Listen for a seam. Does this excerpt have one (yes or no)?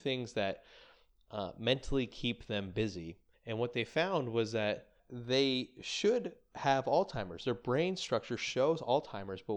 yes